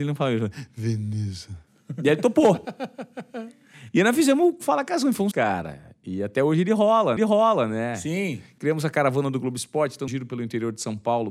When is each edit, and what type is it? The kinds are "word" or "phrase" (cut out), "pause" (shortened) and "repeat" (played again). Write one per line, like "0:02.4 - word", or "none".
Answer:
0:05.3 - word
0:07.2 - repeat
0:10.1 - word